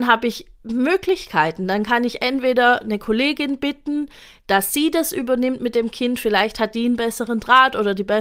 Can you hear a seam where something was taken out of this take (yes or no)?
no